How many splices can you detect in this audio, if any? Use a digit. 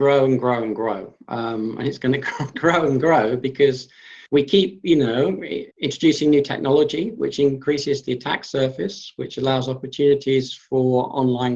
2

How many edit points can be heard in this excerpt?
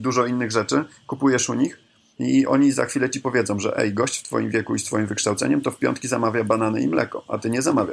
0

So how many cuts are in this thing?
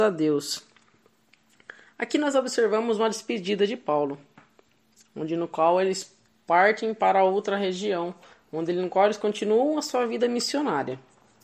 0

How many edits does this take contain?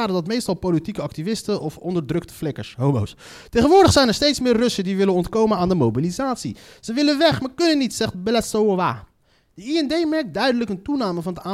0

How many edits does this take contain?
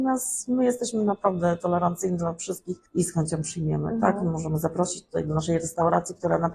1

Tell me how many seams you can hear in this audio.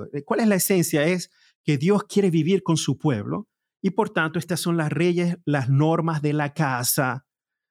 0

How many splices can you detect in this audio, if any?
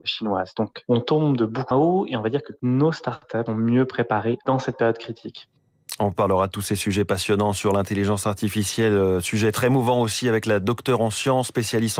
2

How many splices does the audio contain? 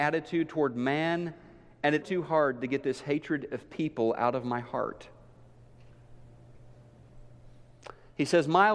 1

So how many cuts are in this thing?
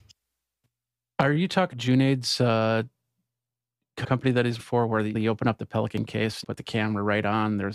5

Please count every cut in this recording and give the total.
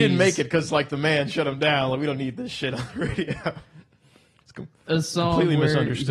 0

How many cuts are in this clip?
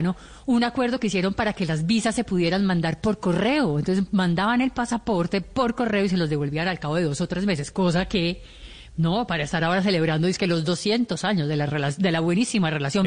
0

